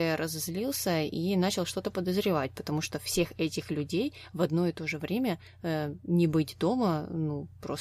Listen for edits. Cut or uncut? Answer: uncut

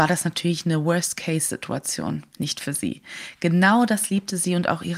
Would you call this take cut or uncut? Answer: cut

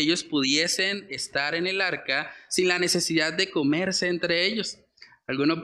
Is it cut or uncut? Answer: uncut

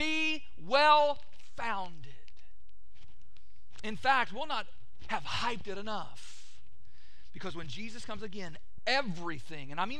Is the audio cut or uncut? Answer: uncut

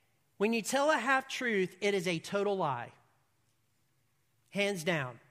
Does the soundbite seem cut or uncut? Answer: uncut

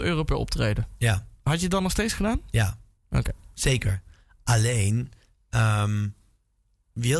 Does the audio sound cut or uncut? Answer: uncut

